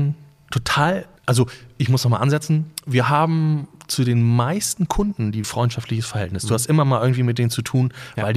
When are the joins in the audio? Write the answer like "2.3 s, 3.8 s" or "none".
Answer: 1.2 s, 5.4 s